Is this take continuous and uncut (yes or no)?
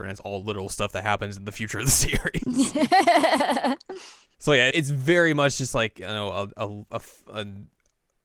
no